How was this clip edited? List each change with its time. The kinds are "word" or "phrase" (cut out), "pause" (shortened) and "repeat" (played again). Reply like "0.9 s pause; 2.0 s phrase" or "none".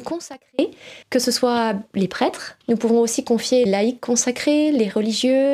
1.0 s pause; 2.6 s word; 3.7 s word